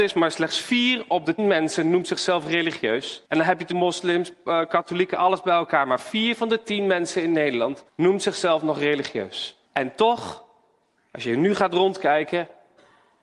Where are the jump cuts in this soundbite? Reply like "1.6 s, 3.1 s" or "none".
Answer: 1.4 s, 3.2 s, 3.7 s, 7.9 s, 9.6 s